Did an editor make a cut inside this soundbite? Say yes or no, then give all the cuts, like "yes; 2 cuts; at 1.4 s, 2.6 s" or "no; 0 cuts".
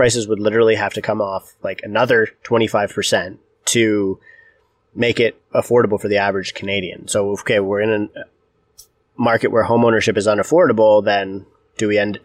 no; 0 cuts